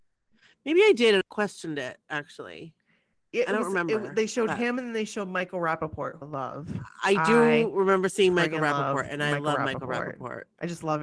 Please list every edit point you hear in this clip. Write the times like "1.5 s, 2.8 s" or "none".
1.2 s, 6.2 s